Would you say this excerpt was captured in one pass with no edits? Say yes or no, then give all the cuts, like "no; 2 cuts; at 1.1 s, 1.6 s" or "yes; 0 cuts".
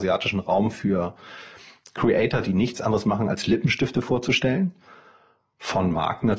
yes; 0 cuts